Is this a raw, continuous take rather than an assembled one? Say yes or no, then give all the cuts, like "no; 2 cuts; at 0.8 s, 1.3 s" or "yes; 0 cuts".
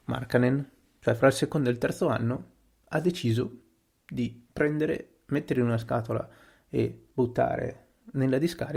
no; 2 cuts; at 4.4 s, 7.1 s